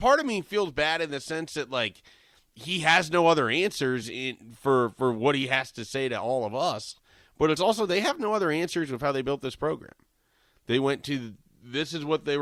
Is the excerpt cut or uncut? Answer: uncut